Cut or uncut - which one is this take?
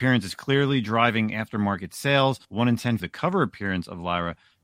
cut